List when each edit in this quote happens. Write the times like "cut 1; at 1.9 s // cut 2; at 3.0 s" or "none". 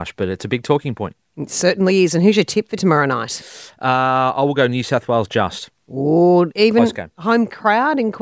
none